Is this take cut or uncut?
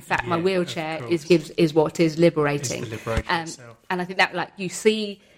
cut